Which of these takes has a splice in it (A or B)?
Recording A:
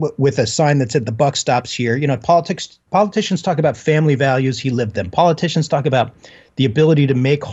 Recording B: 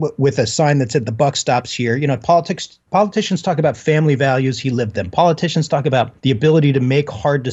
B